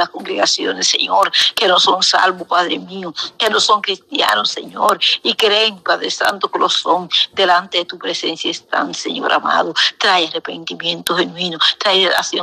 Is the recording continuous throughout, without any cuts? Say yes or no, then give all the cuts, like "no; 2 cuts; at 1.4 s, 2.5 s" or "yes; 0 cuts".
yes; 0 cuts